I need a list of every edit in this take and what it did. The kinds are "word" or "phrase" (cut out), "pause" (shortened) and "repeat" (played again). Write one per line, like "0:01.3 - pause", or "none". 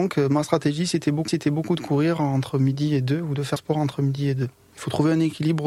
0:01.3 - repeat
0:03.6 - word